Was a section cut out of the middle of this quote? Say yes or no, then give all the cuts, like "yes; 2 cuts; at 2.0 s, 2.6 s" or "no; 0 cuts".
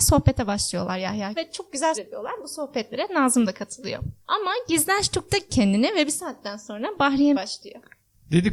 yes; 5 cuts; at 1.4 s, 1.9 s, 4.2 s, 5.5 s, 7.3 s